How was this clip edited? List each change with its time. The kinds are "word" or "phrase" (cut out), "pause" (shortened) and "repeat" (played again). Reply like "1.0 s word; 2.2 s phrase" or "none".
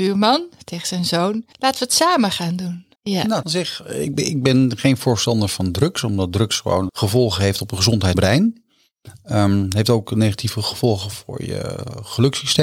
1.5 s pause; 3.0 s pause; 3.4 s phrase; 4.1 s word; 6.9 s phrase; 8.1 s phrase